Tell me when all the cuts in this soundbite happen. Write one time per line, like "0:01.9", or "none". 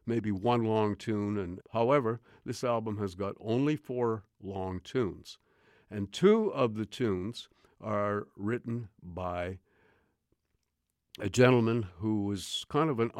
0:01.6